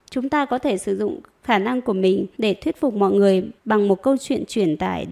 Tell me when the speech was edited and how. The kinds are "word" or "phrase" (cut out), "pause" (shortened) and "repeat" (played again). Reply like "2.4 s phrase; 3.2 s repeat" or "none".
2.3 s pause; 3.6 s pause

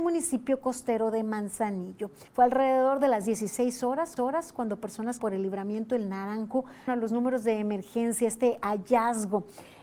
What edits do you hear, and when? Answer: 2.3 s pause; 4.2 s repeat; 5.2 s phrase; 6.9 s word

